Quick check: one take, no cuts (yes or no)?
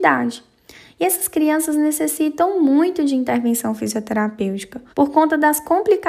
no